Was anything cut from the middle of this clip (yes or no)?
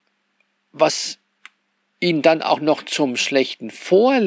no